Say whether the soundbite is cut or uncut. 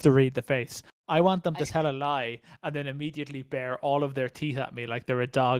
uncut